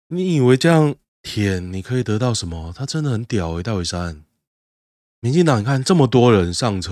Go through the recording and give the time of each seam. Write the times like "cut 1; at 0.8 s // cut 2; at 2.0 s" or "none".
cut 1; at 1.0 s // cut 2; at 4.7 s